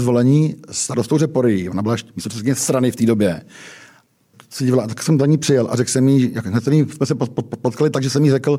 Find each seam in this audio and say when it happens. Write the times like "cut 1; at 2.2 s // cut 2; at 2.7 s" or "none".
cut 1; at 4.3 s

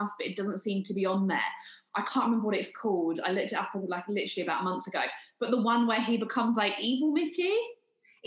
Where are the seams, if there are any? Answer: none

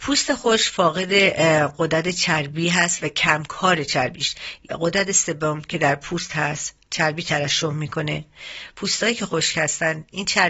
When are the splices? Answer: none

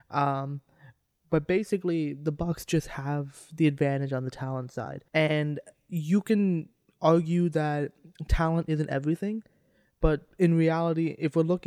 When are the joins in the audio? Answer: cut 1; at 5.1 s

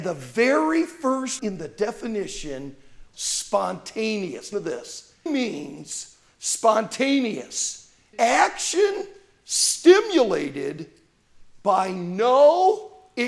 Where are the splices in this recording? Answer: cut 1; at 1.4 s // cut 2; at 3.1 s // cut 3; at 4.5 s // cut 4; at 5.3 s // cut 5; at 8.1 s

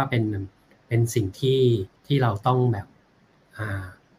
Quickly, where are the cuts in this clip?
cut 1; at 2.0 s

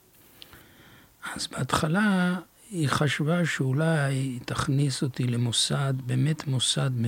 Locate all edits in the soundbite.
none

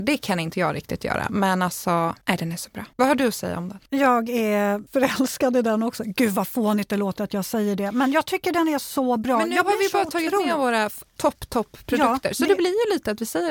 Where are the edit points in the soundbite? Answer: cut 1; at 2.2 s // cut 2; at 2.9 s // cut 3; at 3.9 s // cut 4; at 4.9 s

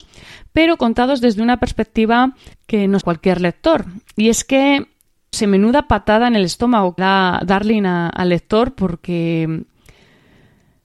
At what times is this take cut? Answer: cut 1; at 2.5 s // cut 2; at 3.0 s // cut 3; at 5.3 s // cut 4; at 7.0 s

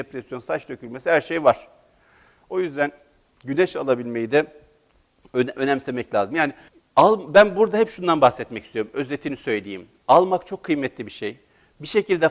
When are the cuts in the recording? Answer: cut 1; at 6.7 s

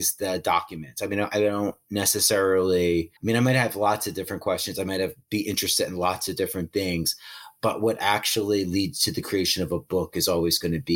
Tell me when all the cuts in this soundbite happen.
cut 1; at 3.2 s

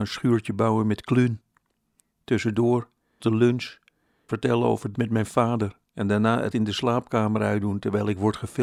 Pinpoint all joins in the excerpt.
cut 1; at 3.2 s // cut 2; at 4.3 s // cut 3; at 4.9 s // cut 4; at 6.5 s

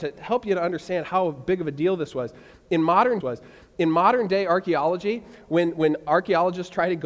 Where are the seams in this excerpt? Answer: cut 1; at 3.2 s

